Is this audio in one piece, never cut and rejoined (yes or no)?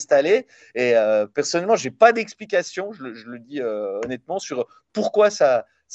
yes